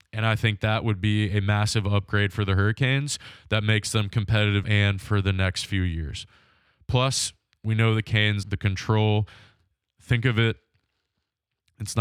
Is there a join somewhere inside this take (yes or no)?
yes